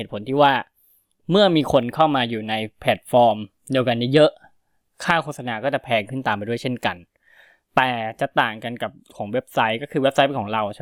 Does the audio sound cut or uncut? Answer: uncut